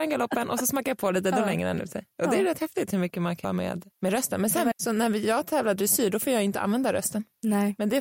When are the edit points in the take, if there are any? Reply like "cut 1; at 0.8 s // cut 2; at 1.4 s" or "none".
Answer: cut 1; at 3.4 s // cut 2; at 3.9 s // cut 3; at 4.7 s